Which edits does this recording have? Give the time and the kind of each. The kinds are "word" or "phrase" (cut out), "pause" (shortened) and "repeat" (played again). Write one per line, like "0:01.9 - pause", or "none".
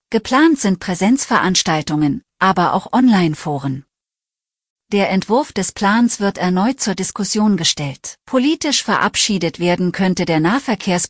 0:08.2 - pause